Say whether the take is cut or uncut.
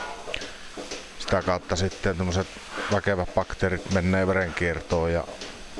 uncut